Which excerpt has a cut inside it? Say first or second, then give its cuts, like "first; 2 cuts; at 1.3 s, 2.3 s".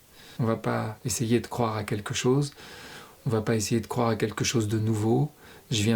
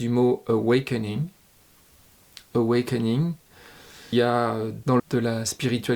second; 2 cuts; at 4.1 s, 5.0 s